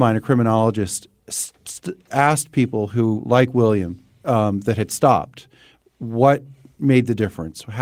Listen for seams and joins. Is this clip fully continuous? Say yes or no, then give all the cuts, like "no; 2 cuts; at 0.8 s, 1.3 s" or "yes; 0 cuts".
yes; 0 cuts